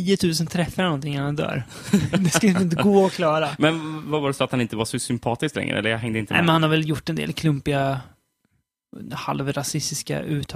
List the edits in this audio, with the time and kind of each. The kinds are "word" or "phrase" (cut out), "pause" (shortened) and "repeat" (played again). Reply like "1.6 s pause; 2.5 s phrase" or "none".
none